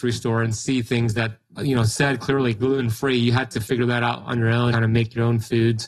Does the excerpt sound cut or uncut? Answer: cut